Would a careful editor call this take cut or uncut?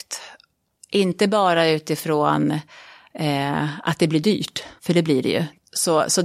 cut